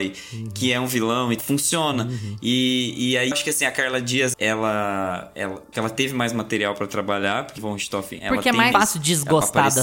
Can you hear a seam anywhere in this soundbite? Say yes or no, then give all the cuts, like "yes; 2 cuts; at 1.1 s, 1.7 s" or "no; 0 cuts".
yes; 6 cuts; at 1.4 s, 3.3 s, 4.3 s, 5.7 s, 7.6 s, 8.7 s